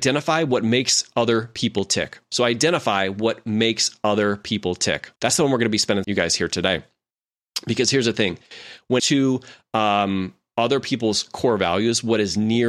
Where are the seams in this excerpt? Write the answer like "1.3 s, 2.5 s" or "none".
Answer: 5.2 s, 6.0 s, 9.0 s